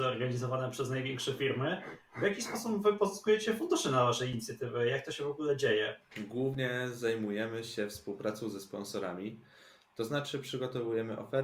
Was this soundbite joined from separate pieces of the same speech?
no; 0 cuts

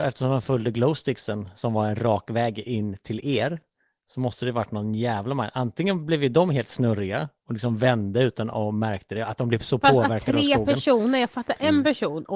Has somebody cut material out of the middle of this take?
no; 0 cuts

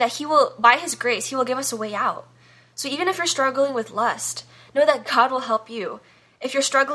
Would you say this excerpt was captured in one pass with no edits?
yes; 0 cuts

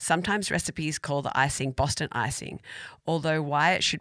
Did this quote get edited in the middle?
no; 0 cuts

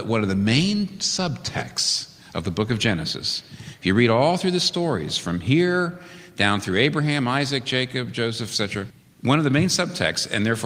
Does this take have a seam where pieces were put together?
no; 0 cuts

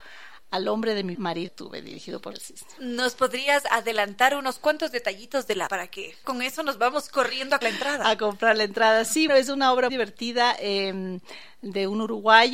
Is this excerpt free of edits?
no; 8 cuts; at 1.1 s, 1.5 s, 2.3 s, 5.7 s, 6.2 s, 7.6 s, 9.3 s, 9.9 s

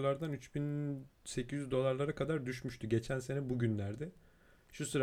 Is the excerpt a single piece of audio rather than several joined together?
yes; 0 cuts

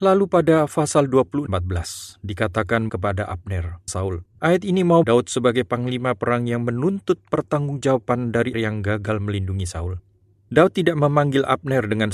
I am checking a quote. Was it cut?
yes; 6 cuts; at 1.5 s, 2.9 s, 3.9 s, 4.4 s, 5.0 s, 8.5 s

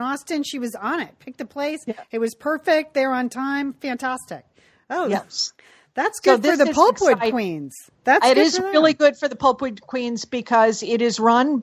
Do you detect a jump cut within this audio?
no; 0 cuts

